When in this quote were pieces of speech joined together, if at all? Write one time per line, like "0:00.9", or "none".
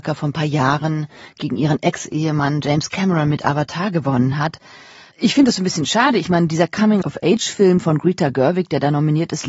none